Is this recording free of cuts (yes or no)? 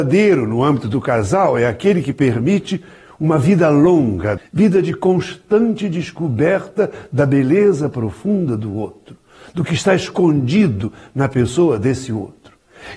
no